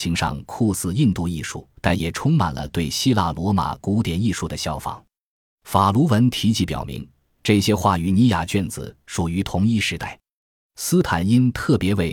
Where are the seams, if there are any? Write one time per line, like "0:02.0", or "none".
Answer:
0:01.8